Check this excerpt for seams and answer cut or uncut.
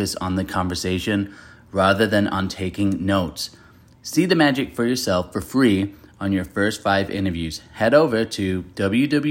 uncut